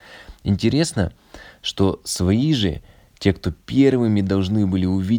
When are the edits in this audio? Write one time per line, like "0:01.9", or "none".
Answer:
none